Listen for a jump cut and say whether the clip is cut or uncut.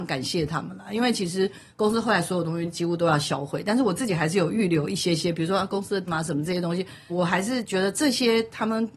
cut